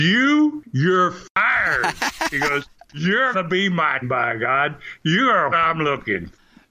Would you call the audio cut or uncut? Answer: cut